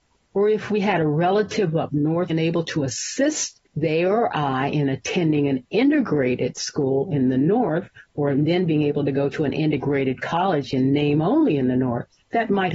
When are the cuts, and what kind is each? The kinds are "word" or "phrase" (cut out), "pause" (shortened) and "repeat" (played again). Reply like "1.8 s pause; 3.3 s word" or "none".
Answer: 2.3 s word; 3.7 s pause